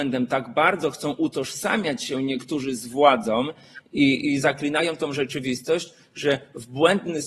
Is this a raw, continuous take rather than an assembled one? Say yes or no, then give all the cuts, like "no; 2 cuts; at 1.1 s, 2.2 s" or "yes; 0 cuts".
yes; 0 cuts